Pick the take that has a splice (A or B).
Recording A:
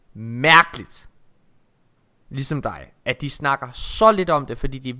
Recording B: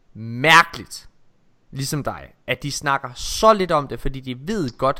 B